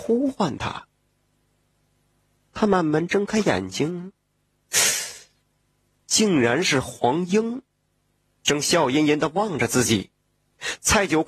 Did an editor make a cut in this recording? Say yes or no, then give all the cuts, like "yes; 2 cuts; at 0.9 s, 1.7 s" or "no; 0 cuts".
no; 0 cuts